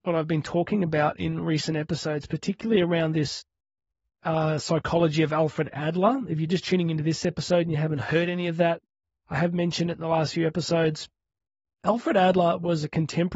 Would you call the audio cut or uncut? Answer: uncut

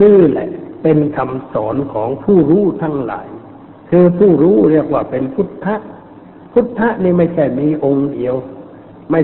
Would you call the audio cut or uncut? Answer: cut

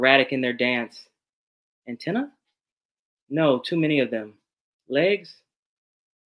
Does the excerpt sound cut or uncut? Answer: uncut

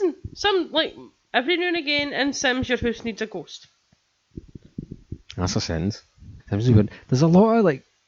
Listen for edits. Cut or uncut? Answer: cut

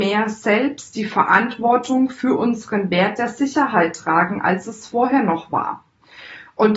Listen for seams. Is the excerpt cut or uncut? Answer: uncut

